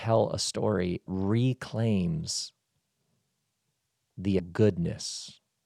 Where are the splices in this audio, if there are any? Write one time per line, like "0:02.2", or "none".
0:01.1
0:04.4